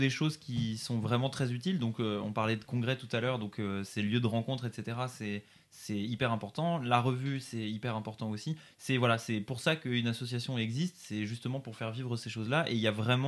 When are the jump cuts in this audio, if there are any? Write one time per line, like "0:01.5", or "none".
none